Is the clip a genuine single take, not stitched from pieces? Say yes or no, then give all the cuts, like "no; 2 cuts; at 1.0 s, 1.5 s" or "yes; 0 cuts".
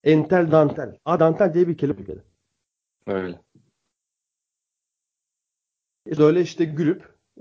no; 3 cuts; at 1.2 s, 1.9 s, 6.2 s